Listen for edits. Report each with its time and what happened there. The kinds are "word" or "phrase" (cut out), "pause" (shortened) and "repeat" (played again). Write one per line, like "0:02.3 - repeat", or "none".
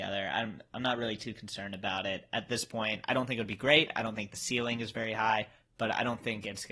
none